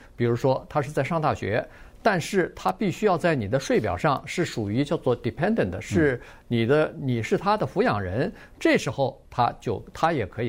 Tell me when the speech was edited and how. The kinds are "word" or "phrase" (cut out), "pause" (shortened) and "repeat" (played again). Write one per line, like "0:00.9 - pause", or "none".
0:09.3 - pause